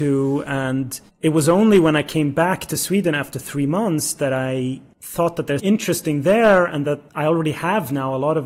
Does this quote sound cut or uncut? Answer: cut